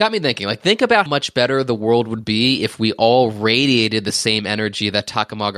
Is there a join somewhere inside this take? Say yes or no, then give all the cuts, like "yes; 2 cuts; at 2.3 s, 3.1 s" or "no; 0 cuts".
yes; 1 cut; at 1.1 s